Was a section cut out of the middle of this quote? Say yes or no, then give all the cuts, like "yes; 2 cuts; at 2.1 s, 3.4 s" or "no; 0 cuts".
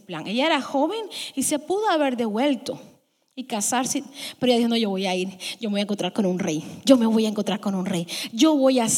no; 0 cuts